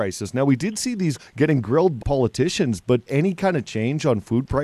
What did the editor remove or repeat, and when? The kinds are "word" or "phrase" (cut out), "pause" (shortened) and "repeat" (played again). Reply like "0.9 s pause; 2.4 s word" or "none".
1.2 s phrase; 2.0 s word; 3.1 s phrase